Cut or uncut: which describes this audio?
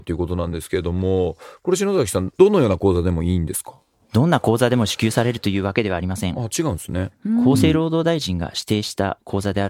uncut